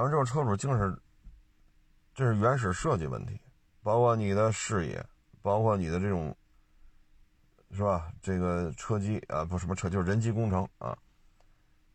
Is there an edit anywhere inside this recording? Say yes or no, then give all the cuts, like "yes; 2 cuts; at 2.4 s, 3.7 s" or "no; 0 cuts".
yes; 1 cut; at 3.8 s